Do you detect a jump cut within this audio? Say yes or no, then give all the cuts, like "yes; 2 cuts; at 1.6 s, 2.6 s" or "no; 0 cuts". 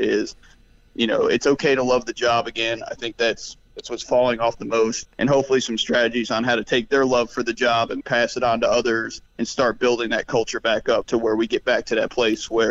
yes; 4 cuts; at 5.0 s, 8.0 s, 9.3 s, 11.0 s